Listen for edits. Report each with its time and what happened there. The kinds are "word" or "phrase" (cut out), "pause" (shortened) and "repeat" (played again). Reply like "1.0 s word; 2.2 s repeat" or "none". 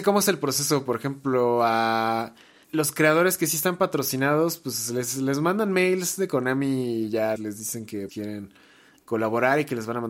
2.6 s word; 7.4 s word; 8.1 s word

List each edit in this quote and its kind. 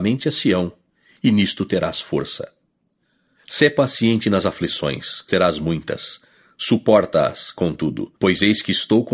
5.3 s word; 8.2 s pause

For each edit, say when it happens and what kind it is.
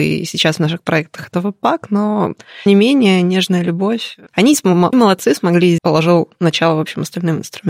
2.7 s word; 4.3 s pause; 4.9 s phrase; 5.8 s phrase

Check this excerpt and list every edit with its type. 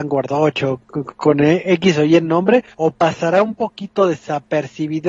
2.7 s pause

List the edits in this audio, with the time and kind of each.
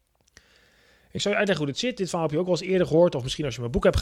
none

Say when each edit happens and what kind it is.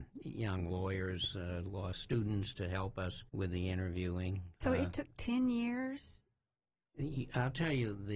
3.3 s pause; 4.6 s pause

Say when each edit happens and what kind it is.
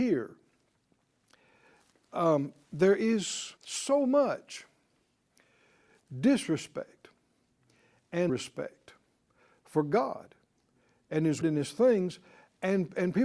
3.6 s pause; 8.3 s phrase; 11.4 s word

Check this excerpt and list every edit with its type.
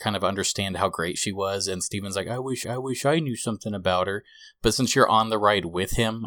2.6 s repeat

